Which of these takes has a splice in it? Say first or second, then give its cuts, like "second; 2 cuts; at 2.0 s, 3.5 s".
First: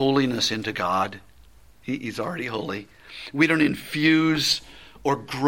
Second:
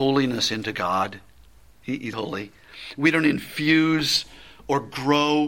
second; 1 cut; at 2.1 s